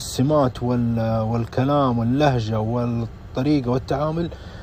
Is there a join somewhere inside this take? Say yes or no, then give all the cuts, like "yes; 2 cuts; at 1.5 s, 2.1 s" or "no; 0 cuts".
no; 0 cuts